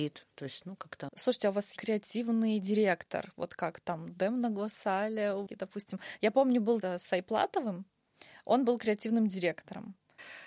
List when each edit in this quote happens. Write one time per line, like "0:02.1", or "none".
0:01.8
0:05.5
0:06.8